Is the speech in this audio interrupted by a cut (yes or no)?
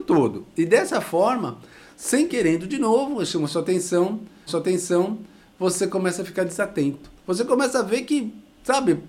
yes